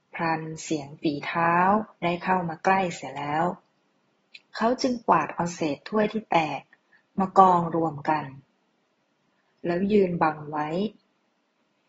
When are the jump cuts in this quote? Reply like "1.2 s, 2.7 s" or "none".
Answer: 1.9 s

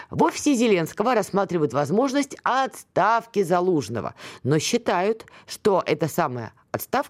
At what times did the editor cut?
none

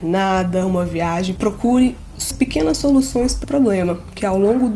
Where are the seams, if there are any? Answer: 2.3 s, 3.4 s

